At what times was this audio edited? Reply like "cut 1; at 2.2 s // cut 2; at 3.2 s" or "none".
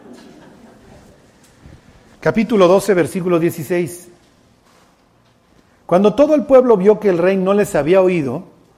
none